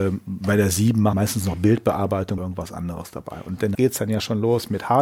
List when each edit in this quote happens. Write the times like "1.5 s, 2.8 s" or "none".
1.1 s, 2.4 s, 3.7 s